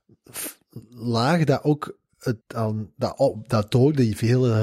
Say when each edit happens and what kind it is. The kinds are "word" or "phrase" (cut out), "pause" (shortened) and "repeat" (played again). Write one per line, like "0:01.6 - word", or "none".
0:02.4 - pause